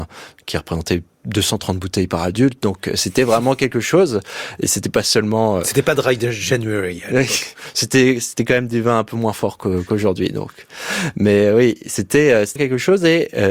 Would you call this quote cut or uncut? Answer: cut